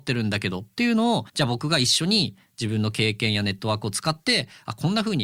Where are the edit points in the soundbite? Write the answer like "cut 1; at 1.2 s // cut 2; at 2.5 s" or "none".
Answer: cut 1; at 1.3 s